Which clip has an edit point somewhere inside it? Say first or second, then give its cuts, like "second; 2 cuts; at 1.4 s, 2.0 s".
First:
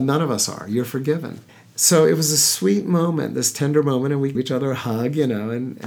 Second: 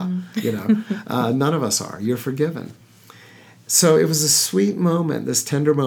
first; 2 cuts; at 1.5 s, 4.3 s